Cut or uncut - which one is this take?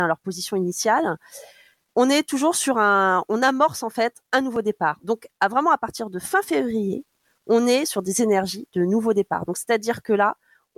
uncut